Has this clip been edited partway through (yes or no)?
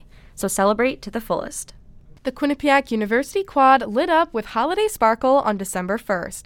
yes